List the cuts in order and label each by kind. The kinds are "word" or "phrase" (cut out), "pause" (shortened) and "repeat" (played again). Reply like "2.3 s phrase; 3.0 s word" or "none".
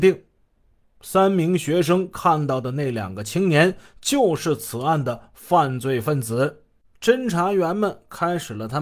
6.8 s pause